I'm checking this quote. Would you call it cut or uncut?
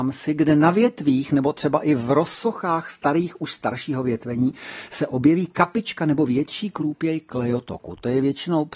uncut